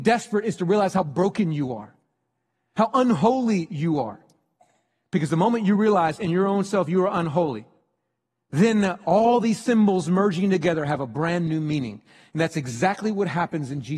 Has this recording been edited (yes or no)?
no